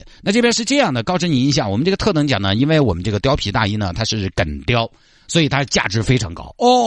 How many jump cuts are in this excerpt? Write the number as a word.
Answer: zero